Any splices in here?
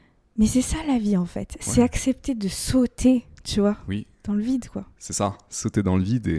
no; 0 cuts

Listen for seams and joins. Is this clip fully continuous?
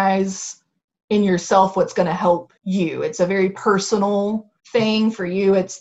no; 2 cuts; at 2.6 s, 4.6 s

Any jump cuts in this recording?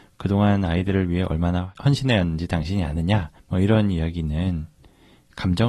yes; 1 cut; at 3.4 s

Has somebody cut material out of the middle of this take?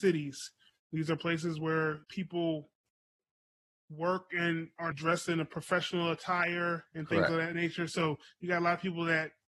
yes; 2 cuts; at 2.0 s, 4.9 s

